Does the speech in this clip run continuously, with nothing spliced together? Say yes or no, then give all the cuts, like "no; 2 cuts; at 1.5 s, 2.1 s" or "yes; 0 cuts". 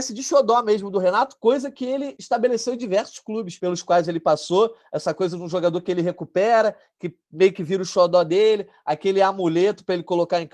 yes; 0 cuts